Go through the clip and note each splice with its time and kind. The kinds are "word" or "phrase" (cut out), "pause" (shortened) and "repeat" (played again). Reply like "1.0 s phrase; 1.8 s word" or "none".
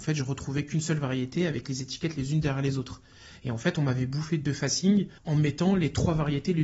5.2 s pause